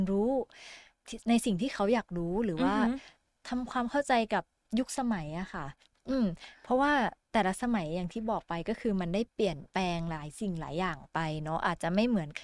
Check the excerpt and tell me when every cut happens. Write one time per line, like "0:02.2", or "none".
none

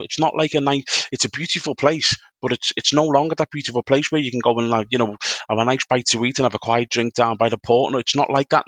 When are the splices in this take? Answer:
none

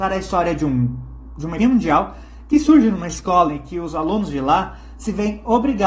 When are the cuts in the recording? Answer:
0:01.6

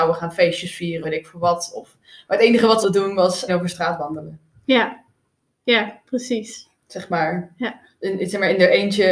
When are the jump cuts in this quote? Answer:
0:01.0
0:02.8
0:03.5

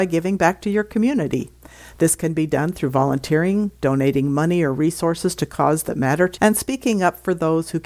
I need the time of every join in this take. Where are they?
0:06.4

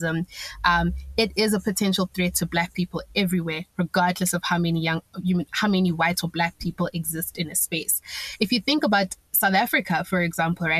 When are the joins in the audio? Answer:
none

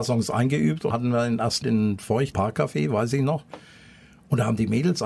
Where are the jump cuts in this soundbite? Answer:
0:00.9
0:01.6
0:02.3

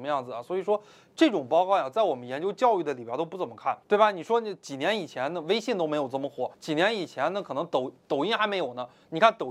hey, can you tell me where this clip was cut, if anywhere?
0:03.8
0:06.5

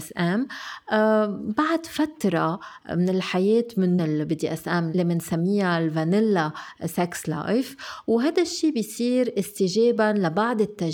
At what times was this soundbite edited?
0:04.0

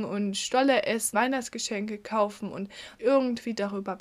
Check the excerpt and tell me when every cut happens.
0:01.1
0:03.0

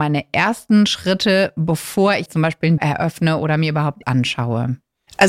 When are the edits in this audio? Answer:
0:02.3
0:02.8
0:04.0

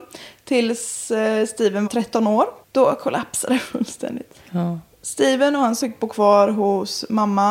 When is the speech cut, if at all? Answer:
0:01.9
0:02.6
0:04.5
0:05.8

